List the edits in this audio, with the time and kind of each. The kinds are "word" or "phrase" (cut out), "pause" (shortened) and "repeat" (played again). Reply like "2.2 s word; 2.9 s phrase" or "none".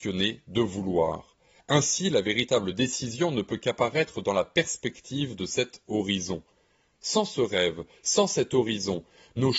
none